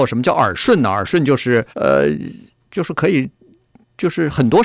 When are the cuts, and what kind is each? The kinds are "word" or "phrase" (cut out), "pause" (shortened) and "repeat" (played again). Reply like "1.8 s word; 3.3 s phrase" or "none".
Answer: 1.7 s pause